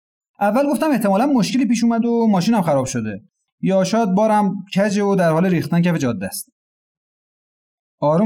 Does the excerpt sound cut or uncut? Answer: uncut